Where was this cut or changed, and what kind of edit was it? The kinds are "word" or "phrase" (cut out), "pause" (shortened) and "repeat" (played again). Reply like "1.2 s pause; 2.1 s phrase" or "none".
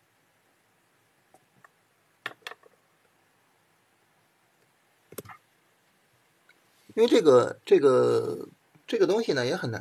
none